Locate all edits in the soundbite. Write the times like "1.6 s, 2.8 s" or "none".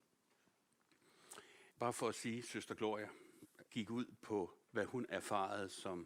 1.7 s, 3.7 s, 4.6 s